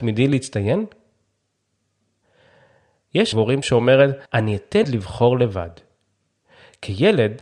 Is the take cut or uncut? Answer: cut